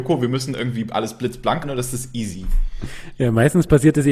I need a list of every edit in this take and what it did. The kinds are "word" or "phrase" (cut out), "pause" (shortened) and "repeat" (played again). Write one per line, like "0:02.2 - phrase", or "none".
0:01.6 - word

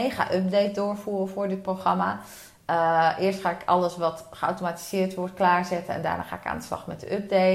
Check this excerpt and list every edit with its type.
none

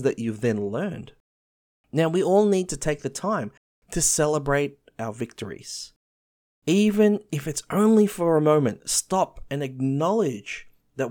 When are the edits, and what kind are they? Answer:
none

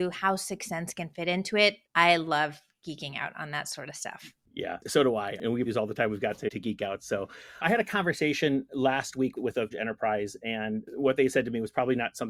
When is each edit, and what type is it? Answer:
0:05.7 - word
0:09.7 - phrase

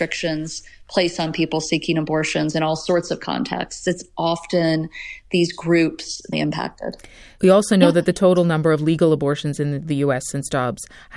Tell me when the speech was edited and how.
0:06.3 - phrase

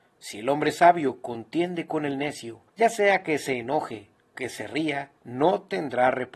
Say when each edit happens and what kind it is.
0:02.7 - pause
0:04.3 - word
0:05.2 - pause

